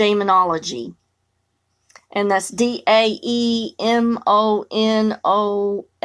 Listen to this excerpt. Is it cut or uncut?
uncut